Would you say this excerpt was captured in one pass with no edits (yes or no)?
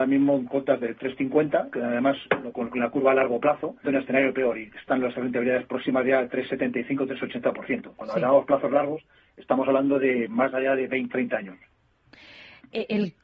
no